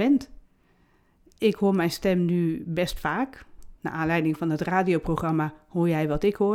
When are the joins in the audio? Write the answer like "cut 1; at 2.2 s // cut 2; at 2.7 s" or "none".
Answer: cut 1; at 3.8 s